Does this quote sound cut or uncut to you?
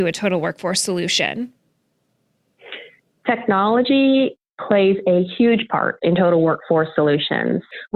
uncut